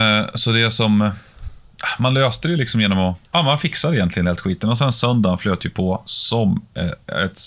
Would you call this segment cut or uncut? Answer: cut